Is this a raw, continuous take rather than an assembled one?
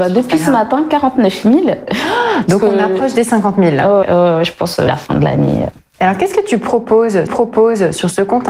no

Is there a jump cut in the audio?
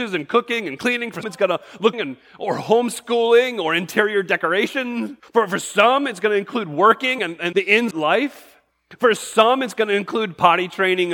yes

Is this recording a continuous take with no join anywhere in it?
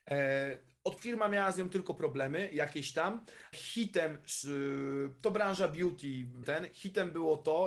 no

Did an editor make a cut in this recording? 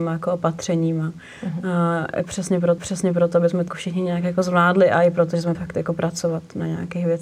yes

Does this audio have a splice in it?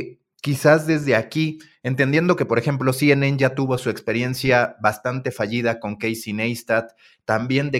no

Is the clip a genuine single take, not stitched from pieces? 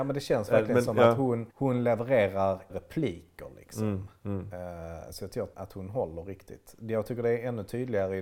no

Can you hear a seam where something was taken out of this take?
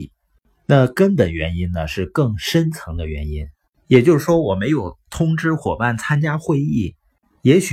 no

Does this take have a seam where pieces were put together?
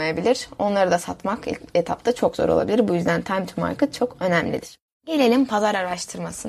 no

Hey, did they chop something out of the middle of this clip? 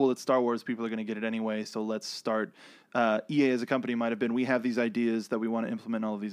no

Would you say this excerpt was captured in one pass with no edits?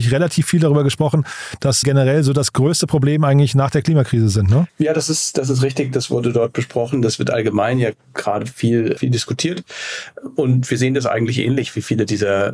no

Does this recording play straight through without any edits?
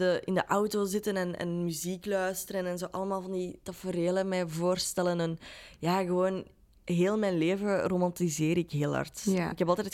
yes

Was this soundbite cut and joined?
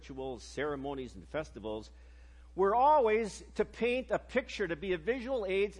no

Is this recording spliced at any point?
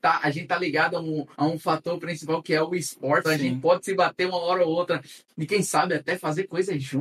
yes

